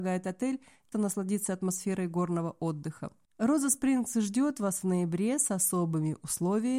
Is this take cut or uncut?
cut